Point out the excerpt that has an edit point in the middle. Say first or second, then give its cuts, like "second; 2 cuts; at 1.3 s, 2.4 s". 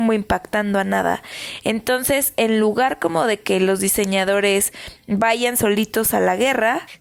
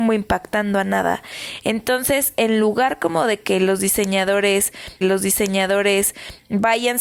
second; 1 cut; at 5.0 s